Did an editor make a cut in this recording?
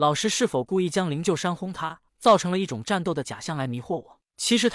yes; 1 cut; at 2.1 s

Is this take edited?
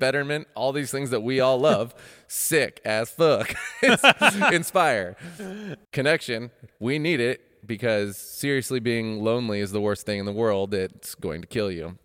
yes; 1 cut; at 5.8 s

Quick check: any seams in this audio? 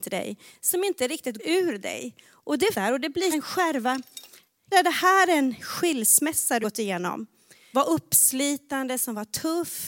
yes; 6 cuts; at 1.4 s, 2.7 s, 3.3 s, 4.7 s, 6.6 s, 7.7 s

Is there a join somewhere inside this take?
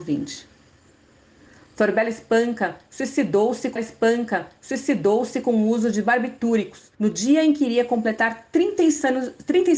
yes; 2 cuts; at 3.8 s, 6.9 s

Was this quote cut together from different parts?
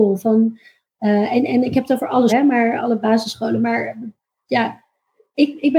yes; 2 cuts; at 2.3 s, 2.8 s

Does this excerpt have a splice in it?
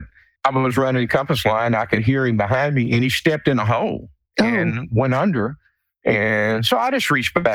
no; 0 cuts

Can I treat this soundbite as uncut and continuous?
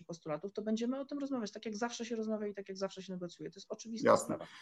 yes; 0 cuts

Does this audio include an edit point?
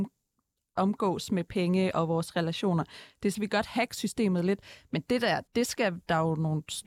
yes; 2 cuts; at 3.3 s, 5.5 s

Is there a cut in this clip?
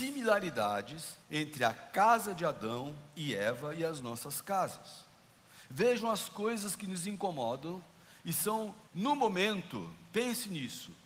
yes; 2 cuts; at 1.2 s, 8.9 s

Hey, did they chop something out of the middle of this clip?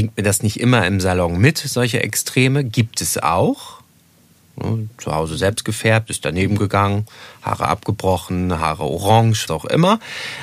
yes; 1 cut; at 9.5 s

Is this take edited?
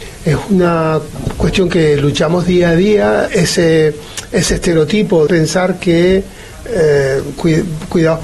yes; 2 cuts; at 3.3 s, 5.3 s

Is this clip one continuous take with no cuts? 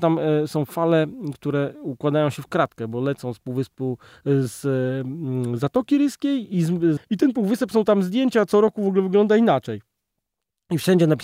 no; 1 cut; at 7.0 s

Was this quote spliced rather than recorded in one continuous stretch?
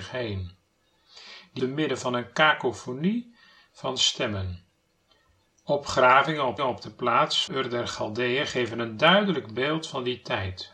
yes; 3 cuts; at 1.6 s, 6.6 s, 7.5 s

